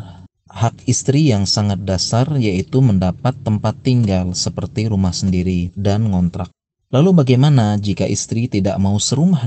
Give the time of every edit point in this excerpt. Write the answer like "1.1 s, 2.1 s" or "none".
5.7 s